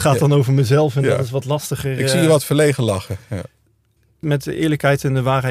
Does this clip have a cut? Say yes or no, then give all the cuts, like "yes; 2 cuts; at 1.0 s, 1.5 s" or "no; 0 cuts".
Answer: yes; 1 cut; at 4.0 s